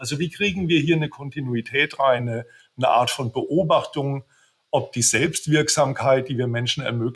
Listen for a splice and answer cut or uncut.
uncut